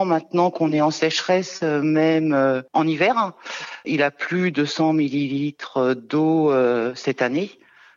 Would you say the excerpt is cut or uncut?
cut